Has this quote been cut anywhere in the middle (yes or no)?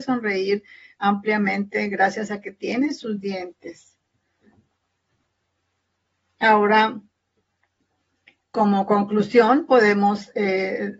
no